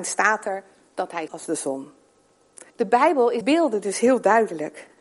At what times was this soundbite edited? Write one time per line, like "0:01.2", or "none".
0:01.3
0:02.7
0:03.4